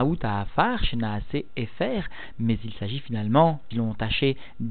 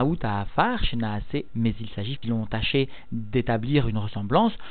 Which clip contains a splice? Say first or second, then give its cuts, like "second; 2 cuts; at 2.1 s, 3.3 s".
second; 2 cuts; at 1.5 s, 2.2 s